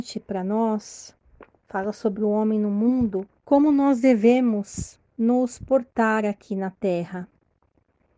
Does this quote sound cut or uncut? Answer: cut